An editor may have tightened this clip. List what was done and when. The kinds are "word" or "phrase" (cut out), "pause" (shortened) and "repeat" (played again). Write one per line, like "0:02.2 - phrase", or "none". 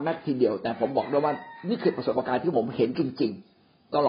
none